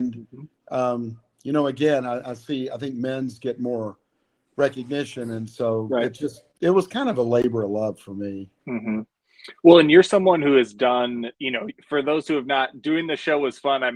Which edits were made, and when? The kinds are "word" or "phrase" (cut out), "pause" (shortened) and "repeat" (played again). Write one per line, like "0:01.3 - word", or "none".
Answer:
0:08.6 - pause
0:11.3 - pause